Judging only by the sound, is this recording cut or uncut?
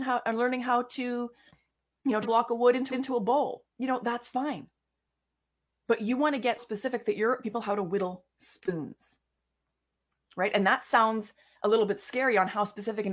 cut